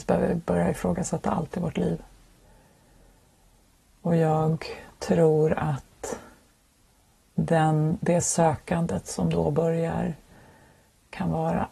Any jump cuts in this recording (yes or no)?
no